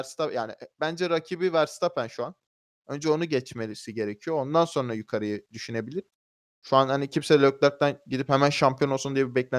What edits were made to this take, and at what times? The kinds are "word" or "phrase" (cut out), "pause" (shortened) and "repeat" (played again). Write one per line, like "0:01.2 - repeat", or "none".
none